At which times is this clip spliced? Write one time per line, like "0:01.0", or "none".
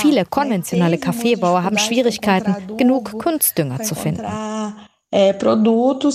none